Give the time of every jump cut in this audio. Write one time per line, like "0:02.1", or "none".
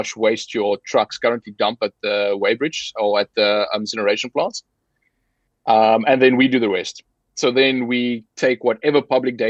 none